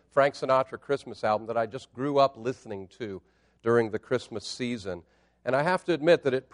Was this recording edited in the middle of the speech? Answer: no; 0 cuts

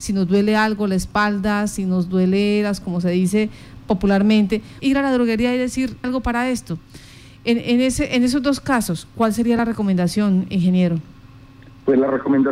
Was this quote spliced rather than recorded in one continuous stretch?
yes; 3 cuts; at 2.8 s, 4.8 s, 6.0 s

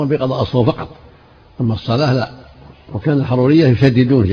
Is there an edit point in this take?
no; 0 cuts

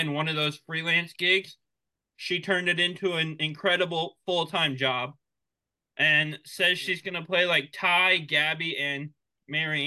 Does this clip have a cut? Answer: no; 0 cuts

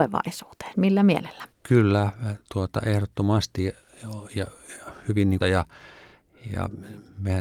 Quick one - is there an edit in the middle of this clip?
yes; 2 cuts; at 1.5 s, 5.4 s

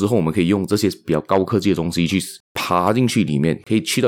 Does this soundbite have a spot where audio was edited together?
yes; 1 cut; at 2.4 s

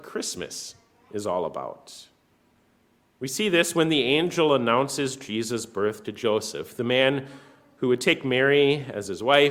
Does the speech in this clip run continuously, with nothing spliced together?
yes; 0 cuts

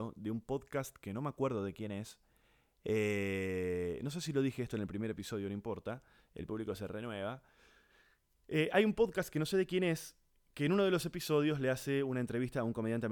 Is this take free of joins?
yes; 0 cuts

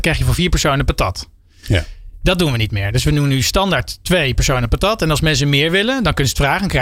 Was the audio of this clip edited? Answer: no; 0 cuts

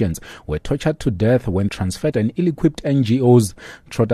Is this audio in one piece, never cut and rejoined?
no; 2 cuts; at 1.7 s, 2.1 s

